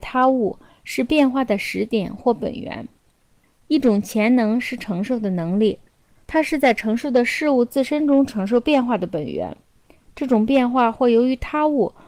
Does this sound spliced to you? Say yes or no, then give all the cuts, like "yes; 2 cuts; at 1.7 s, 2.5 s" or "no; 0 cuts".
no; 0 cuts